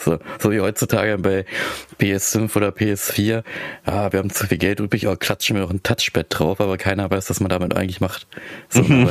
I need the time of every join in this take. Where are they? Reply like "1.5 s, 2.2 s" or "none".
none